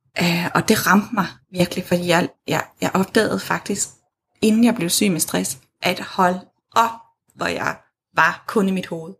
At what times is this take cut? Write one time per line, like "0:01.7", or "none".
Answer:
none